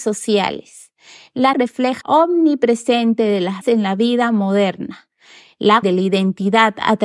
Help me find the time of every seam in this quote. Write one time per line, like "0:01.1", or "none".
0:01.5
0:02.0
0:03.6
0:05.8